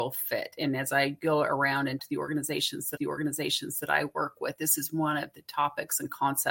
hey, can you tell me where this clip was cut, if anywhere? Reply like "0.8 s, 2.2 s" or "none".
2.0 s, 3.0 s